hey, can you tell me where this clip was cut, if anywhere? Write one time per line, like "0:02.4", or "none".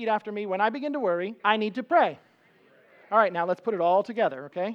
0:01.4